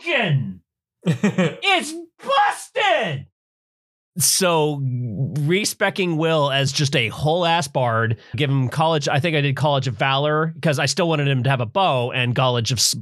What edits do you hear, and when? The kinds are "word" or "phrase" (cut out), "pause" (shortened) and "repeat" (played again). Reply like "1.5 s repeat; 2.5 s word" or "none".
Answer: 8.3 s word